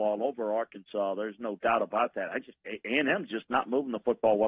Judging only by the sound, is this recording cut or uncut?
uncut